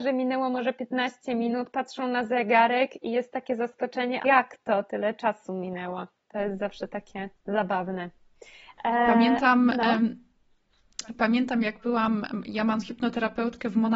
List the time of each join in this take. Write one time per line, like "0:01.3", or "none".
0:04.2
0:07.3
0:12.8